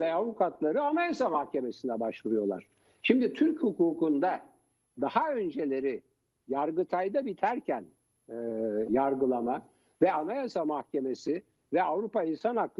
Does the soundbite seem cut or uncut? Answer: uncut